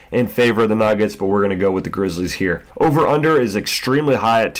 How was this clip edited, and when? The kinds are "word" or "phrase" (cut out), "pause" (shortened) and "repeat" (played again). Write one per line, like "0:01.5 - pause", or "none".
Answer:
0:02.7 - pause